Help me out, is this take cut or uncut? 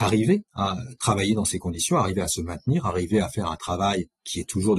uncut